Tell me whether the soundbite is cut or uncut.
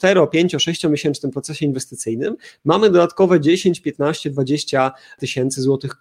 uncut